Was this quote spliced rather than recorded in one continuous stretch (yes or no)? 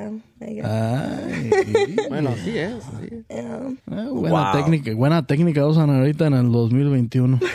yes